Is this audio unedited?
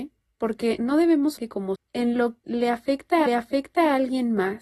no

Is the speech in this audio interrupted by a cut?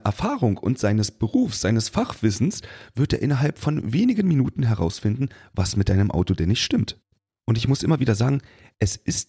no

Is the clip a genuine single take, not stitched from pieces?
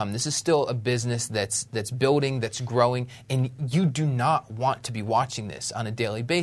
yes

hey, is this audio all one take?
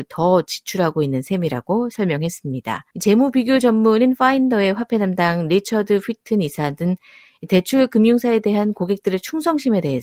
no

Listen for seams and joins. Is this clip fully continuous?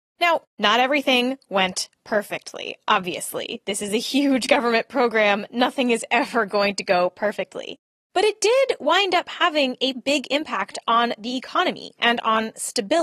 no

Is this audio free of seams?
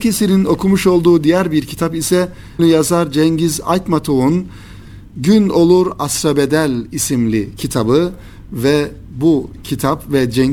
no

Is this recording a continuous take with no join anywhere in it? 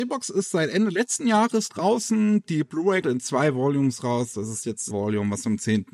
no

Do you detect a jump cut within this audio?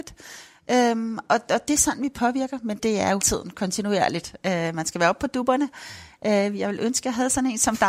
yes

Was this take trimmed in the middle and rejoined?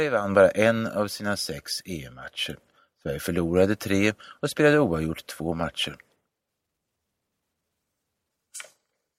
no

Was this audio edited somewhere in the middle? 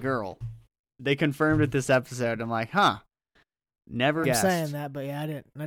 yes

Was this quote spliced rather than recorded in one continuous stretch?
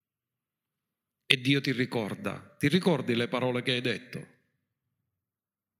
no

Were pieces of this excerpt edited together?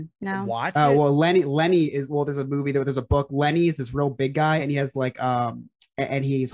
no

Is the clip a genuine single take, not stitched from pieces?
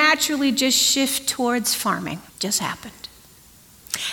no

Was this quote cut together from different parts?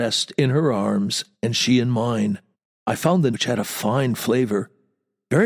yes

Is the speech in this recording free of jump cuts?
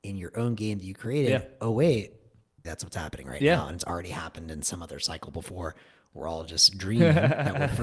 no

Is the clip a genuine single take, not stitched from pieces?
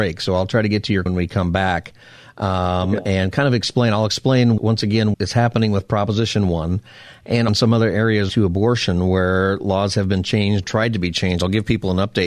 no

